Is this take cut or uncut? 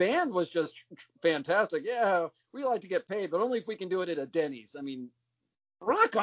uncut